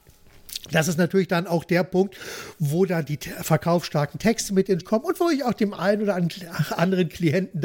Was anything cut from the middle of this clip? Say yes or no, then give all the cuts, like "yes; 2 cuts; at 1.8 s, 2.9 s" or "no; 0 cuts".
yes; 1 cut; at 4.8 s